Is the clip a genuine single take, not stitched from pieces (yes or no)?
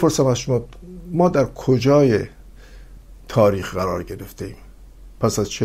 yes